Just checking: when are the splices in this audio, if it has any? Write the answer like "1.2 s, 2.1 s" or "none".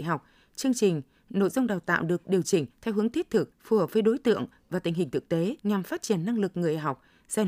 2.7 s, 3.5 s, 5.6 s